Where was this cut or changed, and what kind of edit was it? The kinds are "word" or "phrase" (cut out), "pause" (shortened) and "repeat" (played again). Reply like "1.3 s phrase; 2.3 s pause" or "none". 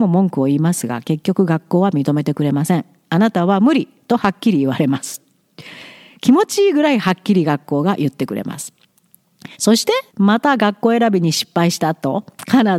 9.5 s pause; 10.1 s pause